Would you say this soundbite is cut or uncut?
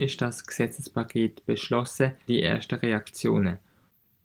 cut